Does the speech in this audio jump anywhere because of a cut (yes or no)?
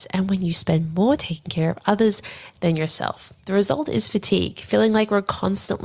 yes